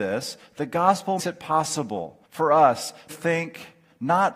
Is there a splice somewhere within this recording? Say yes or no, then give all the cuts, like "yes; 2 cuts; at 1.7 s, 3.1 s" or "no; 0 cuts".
yes; 3 cuts; at 1.2 s, 2.2 s, 3.1 s